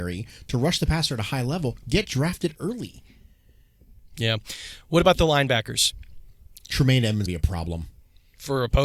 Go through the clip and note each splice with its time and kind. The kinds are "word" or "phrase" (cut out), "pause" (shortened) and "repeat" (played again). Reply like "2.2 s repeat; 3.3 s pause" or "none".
7.3 s phrase